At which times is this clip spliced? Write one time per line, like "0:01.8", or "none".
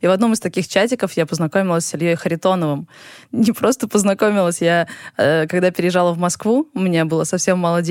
none

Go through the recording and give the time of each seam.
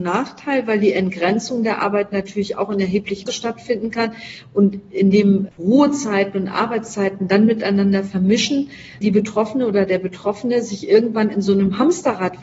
0:03.3
0:05.5
0:09.0

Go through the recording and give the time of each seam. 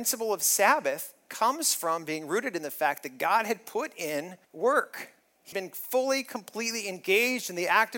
0:04.4
0:05.5

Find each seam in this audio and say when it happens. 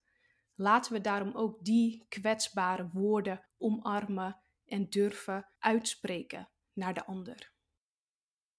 0:03.5
0:05.6

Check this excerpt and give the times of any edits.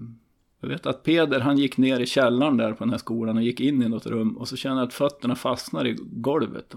none

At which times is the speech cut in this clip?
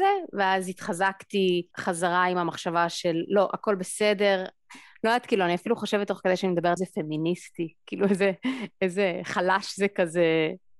0:01.7
0:06.8

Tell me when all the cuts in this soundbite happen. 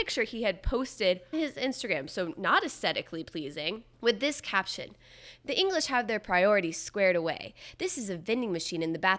0:01.3
0:03.9

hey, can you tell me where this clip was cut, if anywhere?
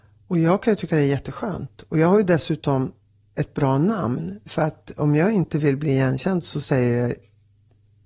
none

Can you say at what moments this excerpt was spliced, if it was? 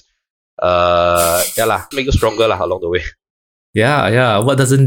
0:01.9

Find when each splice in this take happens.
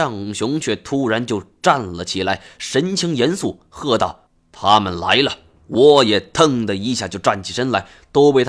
0:04.3
0:05.6

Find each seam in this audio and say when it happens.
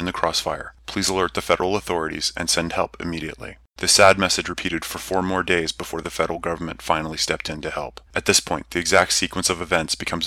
0:03.7
0:08.1

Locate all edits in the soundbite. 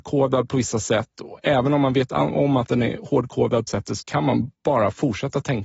0:03.7
0:04.0
0:04.5

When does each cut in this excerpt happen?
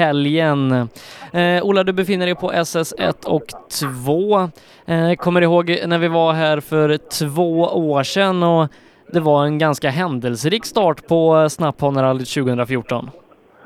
none

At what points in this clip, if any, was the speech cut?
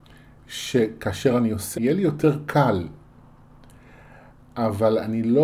0:01.7

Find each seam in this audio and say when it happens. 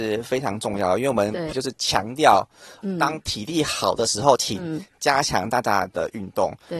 0:01.5

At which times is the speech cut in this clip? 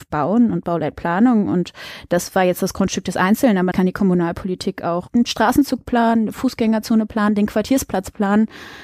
0:03.7

